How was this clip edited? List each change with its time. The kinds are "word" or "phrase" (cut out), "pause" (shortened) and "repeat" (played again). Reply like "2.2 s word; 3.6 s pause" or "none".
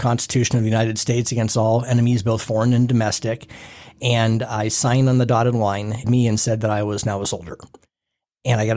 6.0 s phrase